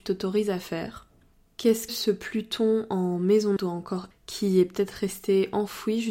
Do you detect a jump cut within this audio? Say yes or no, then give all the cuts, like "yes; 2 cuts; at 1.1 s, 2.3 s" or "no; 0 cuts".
yes; 3 cuts; at 1.9 s, 3.6 s, 4.1 s